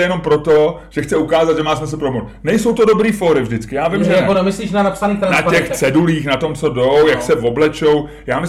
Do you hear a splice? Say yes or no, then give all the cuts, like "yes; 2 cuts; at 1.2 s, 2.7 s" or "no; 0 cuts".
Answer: no; 0 cuts